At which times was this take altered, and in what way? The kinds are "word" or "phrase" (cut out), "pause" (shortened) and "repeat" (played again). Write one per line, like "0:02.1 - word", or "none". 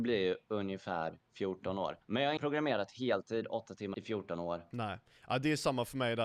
0:02.0 - pause
0:02.4 - word
0:03.9 - phrase